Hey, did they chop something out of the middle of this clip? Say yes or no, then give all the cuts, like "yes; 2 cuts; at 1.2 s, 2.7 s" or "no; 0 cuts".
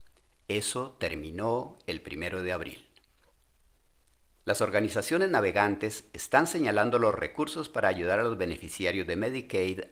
no; 0 cuts